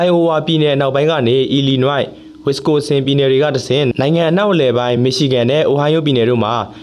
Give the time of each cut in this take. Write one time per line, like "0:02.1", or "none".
none